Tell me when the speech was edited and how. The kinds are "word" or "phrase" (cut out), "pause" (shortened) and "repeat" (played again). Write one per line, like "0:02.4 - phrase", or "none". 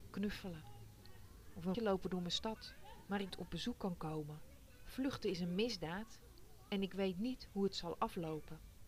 0:01.7 - word
0:03.3 - phrase